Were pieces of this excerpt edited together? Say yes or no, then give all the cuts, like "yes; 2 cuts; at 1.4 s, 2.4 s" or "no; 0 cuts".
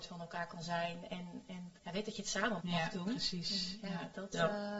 yes; 2 cuts; at 1.8 s, 2.6 s